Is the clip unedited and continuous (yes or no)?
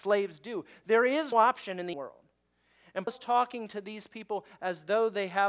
no